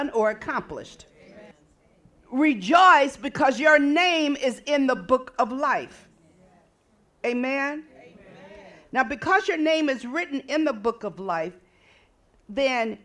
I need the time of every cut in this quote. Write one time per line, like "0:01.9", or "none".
none